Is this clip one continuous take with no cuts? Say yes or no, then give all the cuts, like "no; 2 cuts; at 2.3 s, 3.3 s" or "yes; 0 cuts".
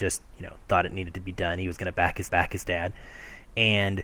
no; 1 cut; at 2.3 s